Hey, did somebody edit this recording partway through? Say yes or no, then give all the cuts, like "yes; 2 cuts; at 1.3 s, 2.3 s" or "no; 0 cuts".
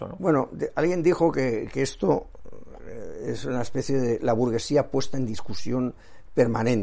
no; 0 cuts